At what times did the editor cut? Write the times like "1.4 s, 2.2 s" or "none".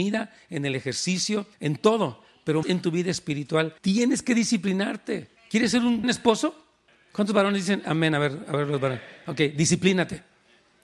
1.5 s, 2.6 s, 3.8 s, 5.4 s, 6.0 s, 6.9 s